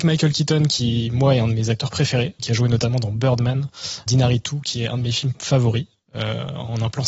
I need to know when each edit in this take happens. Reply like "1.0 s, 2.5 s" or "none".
2.4 s, 4.1 s

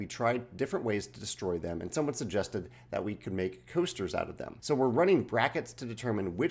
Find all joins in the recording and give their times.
4.6 s

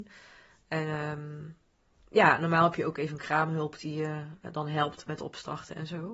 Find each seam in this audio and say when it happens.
none

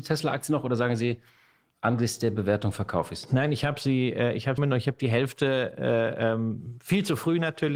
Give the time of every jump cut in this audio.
4.6 s

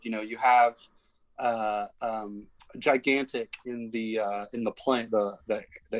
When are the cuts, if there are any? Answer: none

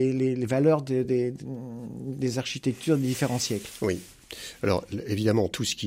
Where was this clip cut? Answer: none

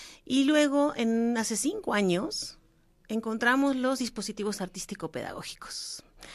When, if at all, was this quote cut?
none

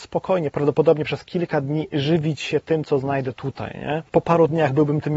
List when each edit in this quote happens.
none

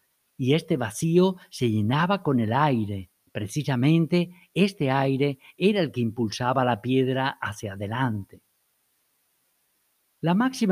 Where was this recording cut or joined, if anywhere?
3.3 s

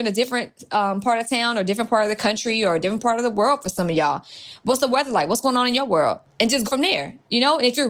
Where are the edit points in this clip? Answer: 6.3 s, 6.6 s

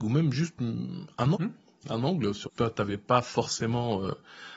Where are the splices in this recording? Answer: 1.3 s, 2.5 s

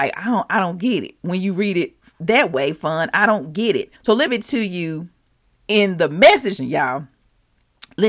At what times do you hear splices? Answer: 4.0 s, 4.3 s, 6.6 s

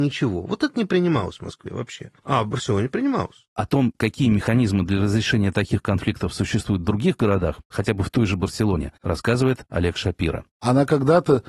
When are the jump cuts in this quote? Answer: 2.2 s, 9.0 s

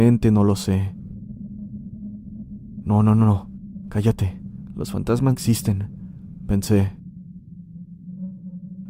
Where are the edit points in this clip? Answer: 5.3 s

